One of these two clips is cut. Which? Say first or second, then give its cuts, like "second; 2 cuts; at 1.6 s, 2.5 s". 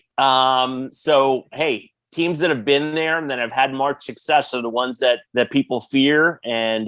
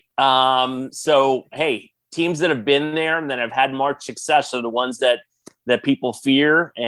first; 1 cut; at 5.2 s